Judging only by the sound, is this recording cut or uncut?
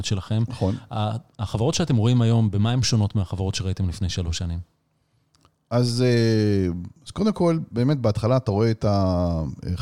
uncut